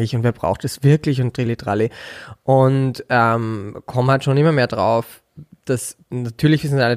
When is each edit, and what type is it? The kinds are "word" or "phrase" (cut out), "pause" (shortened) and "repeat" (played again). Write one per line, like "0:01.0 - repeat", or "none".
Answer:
0:06.0 - pause